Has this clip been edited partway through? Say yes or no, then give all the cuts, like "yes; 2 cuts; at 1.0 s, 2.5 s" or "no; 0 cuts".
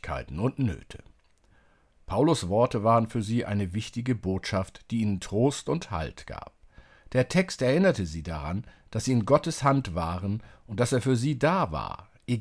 no; 0 cuts